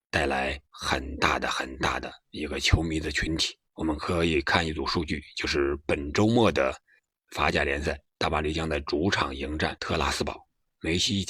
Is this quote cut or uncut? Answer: cut